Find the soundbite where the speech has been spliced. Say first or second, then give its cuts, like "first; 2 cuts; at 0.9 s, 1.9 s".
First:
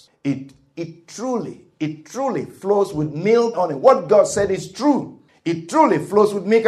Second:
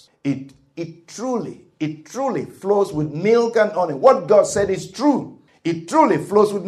first; 1 cut; at 3.5 s